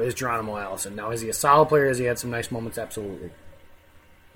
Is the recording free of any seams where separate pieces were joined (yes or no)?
yes